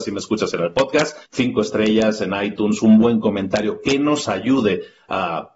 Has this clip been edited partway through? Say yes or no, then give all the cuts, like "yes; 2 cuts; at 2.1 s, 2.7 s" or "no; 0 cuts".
yes; 1 cut; at 1.2 s